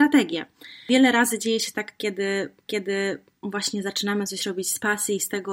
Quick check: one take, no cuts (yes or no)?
no